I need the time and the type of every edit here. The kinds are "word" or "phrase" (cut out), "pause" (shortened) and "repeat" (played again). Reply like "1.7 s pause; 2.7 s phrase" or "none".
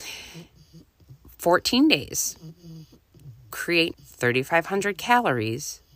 3.5 s word; 3.9 s word